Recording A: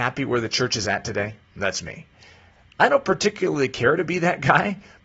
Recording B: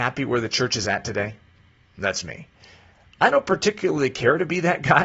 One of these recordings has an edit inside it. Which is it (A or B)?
A